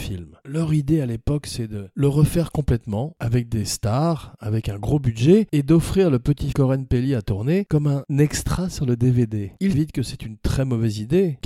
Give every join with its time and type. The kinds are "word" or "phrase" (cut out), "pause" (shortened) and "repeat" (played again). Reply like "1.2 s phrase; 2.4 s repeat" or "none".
6.5 s word; 9.7 s phrase